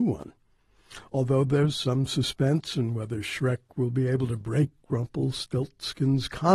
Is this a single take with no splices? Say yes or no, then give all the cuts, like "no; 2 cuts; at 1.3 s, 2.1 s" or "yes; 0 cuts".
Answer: yes; 0 cuts